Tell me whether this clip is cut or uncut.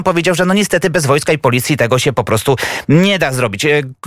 uncut